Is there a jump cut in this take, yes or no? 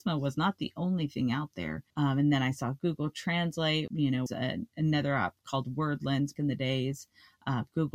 yes